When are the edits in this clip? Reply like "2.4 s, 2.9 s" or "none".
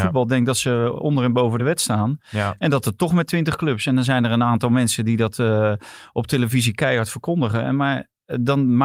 none